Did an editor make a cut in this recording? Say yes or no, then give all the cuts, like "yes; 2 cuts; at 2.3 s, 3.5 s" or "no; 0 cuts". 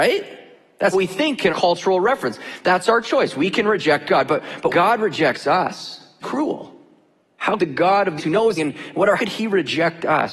yes; 8 cuts; at 0.9 s, 1.5 s, 4.7 s, 6.2 s, 7.6 s, 8.2 s, 8.6 s, 9.2 s